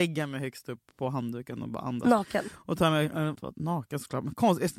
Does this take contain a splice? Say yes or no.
yes